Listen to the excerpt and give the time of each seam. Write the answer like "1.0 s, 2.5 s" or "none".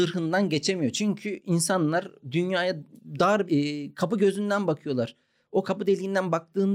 3.5 s, 5.6 s